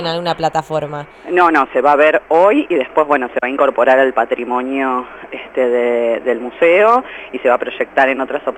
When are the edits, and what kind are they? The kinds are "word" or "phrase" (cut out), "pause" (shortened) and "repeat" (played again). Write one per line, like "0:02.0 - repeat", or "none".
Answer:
none